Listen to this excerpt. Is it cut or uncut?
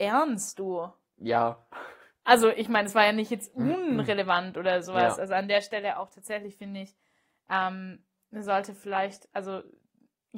uncut